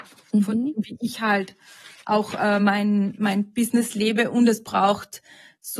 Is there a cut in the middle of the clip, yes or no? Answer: no